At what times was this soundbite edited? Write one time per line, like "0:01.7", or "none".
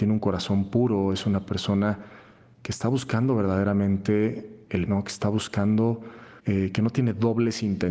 0:04.9
0:06.4

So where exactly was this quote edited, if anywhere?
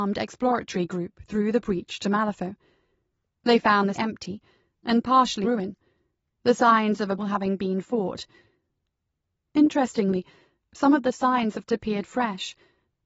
0:03.9
0:05.4
0:07.2
0:11.7

